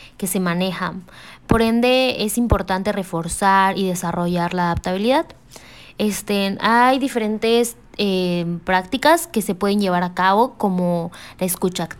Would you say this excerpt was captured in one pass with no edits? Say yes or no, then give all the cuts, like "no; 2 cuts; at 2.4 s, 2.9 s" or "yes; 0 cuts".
yes; 0 cuts